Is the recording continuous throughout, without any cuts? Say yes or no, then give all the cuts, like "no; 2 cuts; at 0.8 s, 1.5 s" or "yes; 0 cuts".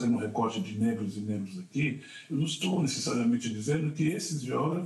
yes; 0 cuts